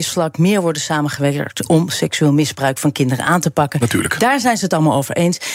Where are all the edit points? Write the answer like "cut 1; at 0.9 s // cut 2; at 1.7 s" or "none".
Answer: none